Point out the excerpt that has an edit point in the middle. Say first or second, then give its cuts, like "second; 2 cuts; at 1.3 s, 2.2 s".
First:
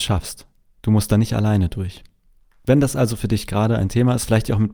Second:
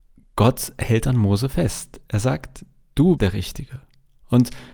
second; 1 cut; at 3.2 s